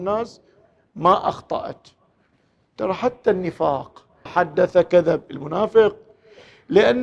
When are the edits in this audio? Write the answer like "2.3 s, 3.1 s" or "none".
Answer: 4.3 s